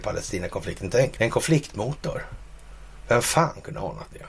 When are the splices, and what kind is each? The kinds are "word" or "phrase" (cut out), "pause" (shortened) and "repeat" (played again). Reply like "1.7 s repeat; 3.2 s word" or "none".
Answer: 1.2 s word